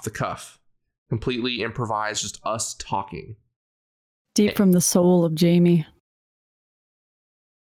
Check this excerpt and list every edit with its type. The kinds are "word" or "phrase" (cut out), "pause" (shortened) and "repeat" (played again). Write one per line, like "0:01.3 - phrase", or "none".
none